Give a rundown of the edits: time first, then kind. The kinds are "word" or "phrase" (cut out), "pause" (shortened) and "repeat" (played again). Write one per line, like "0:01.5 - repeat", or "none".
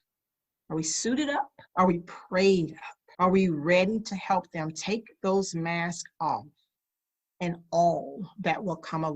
0:01.7 - pause
0:03.1 - pause